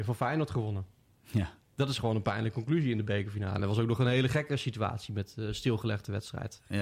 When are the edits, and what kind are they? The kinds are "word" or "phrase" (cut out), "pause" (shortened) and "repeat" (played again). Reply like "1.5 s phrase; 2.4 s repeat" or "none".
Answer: none